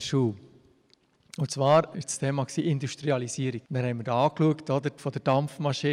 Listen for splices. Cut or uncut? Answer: cut